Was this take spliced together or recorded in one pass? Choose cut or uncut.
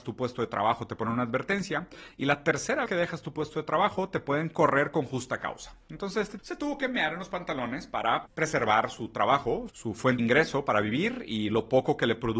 cut